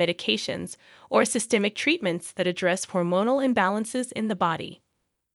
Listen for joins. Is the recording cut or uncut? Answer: uncut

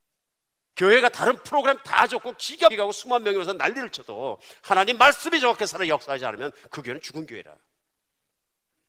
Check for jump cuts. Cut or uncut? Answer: cut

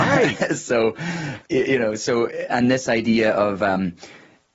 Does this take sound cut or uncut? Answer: cut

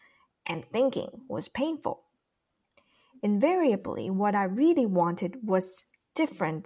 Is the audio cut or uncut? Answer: uncut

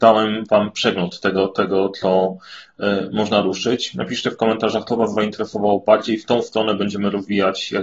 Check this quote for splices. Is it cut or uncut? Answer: uncut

